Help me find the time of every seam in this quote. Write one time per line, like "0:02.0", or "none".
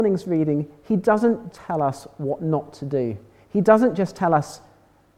0:01.5